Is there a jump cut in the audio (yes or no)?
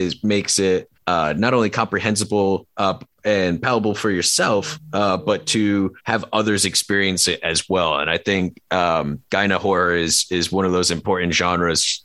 yes